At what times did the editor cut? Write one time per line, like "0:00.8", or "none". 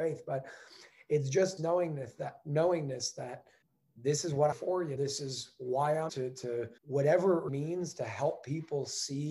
0:01.6
0:03.6
0:04.5
0:05.0
0:06.1
0:06.8
0:07.5